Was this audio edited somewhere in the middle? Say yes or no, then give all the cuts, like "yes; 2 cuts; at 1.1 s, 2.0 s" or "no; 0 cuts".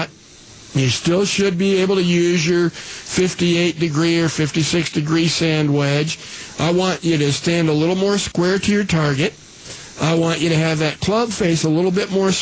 no; 0 cuts